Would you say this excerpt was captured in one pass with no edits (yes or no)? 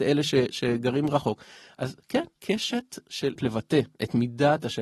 no